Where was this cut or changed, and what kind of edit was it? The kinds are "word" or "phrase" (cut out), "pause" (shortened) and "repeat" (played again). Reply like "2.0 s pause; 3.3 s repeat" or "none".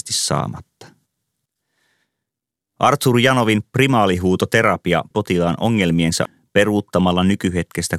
5.1 s word; 6.3 s word

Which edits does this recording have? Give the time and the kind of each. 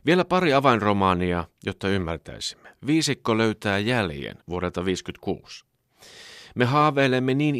1.5 s pause; 4.4 s pause

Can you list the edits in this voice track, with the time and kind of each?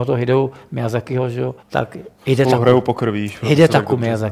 1.6 s pause

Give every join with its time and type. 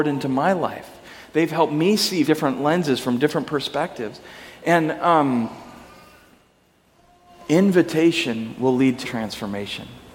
2.3 s word; 9.0 s word

